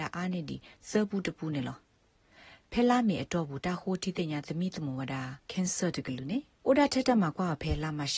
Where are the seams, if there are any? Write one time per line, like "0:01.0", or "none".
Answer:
0:05.4